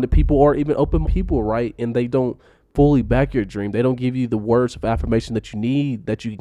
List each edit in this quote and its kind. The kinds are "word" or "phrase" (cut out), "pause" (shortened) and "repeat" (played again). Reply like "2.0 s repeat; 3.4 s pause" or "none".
1.0 s word; 2.1 s word